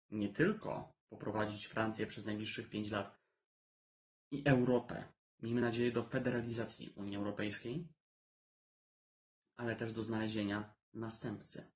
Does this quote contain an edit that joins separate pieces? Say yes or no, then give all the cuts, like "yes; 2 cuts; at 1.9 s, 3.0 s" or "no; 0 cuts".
no; 0 cuts